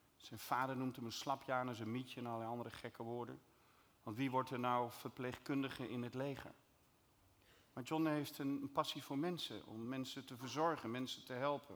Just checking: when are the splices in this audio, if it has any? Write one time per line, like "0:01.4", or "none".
none